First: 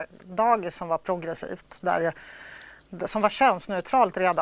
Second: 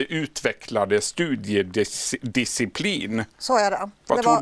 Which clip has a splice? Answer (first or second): second